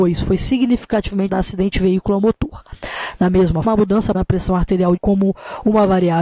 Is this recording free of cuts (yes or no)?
no